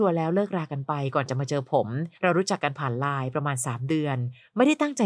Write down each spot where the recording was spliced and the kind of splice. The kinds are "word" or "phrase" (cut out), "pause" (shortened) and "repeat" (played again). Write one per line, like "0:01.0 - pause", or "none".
0:02.1 - pause

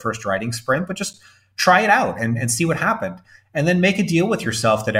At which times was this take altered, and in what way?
none

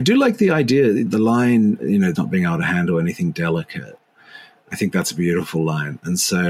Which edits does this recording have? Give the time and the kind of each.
0:01.1 - word
0:01.8 - word
0:02.1 - word

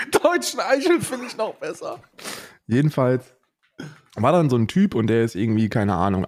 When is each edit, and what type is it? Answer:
none

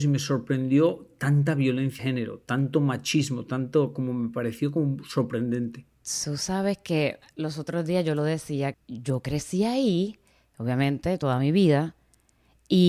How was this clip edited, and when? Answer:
0:02.0 - word
0:05.9 - pause
0:08.7 - word
0:10.3 - pause

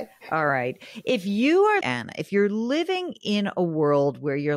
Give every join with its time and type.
0:01.8 - word

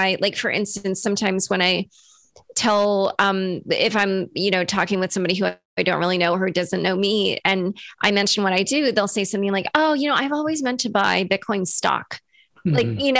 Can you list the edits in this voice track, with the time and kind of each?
none

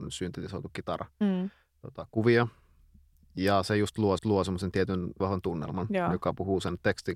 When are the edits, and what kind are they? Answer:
0:04.2 - repeat
0:05.2 - phrase

